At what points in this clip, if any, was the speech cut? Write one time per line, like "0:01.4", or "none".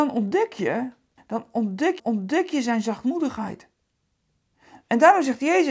0:01.2
0:02.0